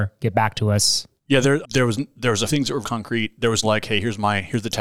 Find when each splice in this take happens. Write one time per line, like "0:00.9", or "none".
0:01.2
0:01.6
0:02.5
0:02.8
0:03.6

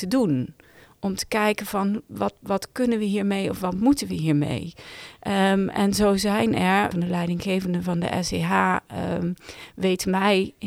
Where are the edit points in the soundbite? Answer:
0:06.9

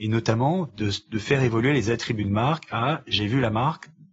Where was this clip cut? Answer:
none

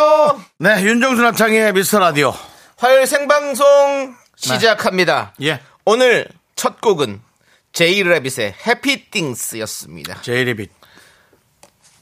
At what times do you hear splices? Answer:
none

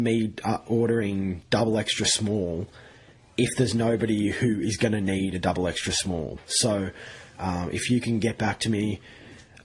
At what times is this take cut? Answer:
none

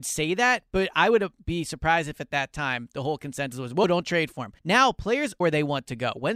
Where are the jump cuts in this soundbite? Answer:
0:03.8
0:04.6
0:05.4

